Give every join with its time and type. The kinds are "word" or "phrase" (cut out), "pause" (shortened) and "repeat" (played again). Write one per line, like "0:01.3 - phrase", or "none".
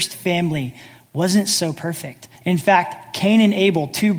0:02.4 - pause